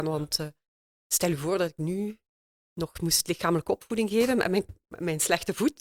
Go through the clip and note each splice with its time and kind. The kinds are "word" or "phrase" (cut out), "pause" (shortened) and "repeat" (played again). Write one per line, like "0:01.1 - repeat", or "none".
none